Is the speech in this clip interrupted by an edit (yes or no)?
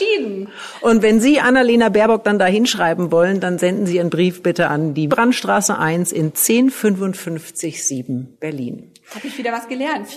yes